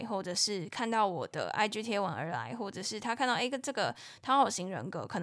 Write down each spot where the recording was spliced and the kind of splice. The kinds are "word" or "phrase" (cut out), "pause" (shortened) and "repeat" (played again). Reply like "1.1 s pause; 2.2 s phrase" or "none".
none